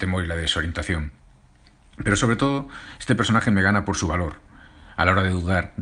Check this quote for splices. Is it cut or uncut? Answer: uncut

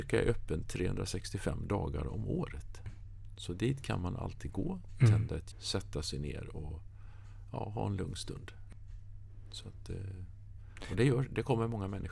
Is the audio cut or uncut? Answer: cut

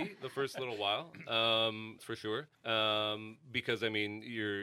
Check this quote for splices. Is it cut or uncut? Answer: cut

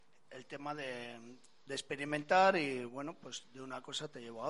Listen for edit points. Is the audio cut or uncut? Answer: uncut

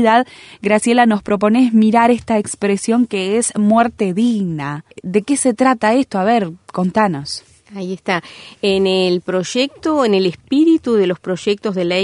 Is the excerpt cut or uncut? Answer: cut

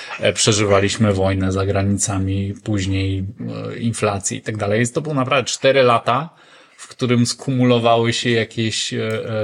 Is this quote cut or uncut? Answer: uncut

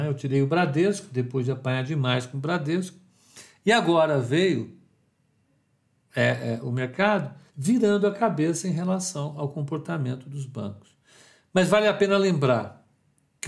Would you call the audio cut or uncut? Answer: cut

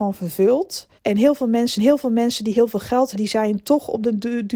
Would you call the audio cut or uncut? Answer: cut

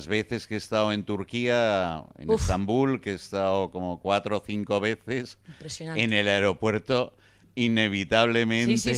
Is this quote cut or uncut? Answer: uncut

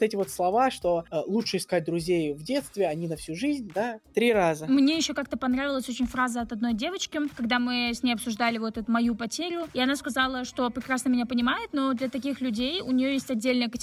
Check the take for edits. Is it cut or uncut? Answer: uncut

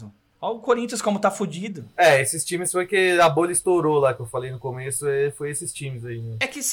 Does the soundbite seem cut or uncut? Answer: uncut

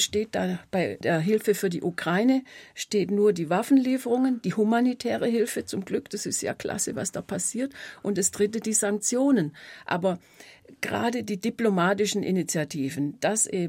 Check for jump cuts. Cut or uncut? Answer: uncut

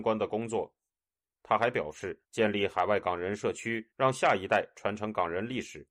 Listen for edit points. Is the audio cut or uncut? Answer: cut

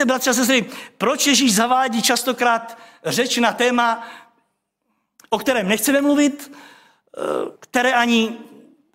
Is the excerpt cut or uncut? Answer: cut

